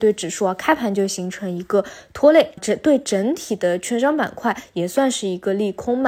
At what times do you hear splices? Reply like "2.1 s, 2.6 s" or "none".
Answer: 2.6 s